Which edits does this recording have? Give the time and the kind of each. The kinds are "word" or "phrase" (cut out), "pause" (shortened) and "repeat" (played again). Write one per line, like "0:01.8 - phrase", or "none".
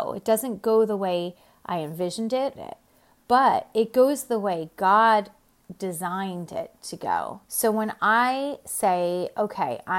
0:02.6 - phrase
0:07.4 - pause

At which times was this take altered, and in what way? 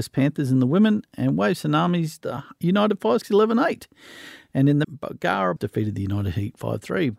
0:02.2 - word
0:03.2 - word
0:04.8 - word
0:05.6 - word

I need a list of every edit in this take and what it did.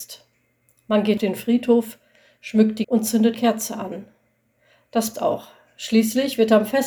0:01.2 - word
0:02.8 - word
0:03.3 - word
0:05.1 - word

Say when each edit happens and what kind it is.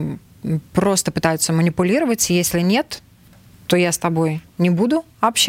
none

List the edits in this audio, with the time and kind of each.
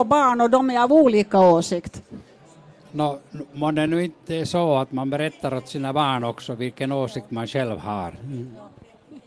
none

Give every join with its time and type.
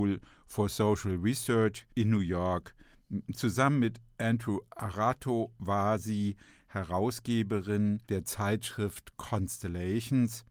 0:01.9 - pause
0:08.0 - pause

